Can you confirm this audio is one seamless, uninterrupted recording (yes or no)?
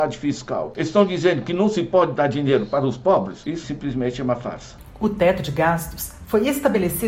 no